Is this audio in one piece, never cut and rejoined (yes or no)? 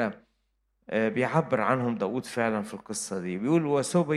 yes